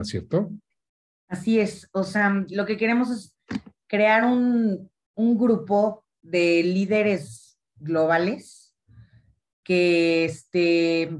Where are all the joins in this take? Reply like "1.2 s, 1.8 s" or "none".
none